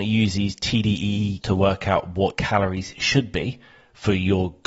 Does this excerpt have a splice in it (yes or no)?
yes